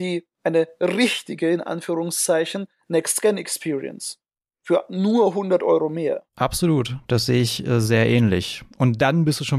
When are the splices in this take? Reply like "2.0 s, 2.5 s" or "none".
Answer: 4.3 s, 6.3 s